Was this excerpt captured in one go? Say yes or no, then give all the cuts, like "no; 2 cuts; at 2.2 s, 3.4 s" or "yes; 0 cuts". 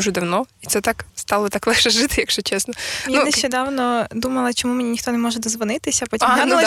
no; 1 cut; at 1.1 s